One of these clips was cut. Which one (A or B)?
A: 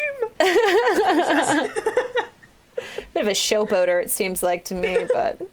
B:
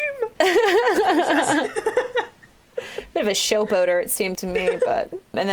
B